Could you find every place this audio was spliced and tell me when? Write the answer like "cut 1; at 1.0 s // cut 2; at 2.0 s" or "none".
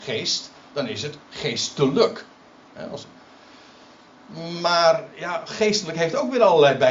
none